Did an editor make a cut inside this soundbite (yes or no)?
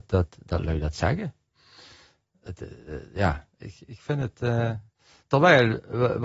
no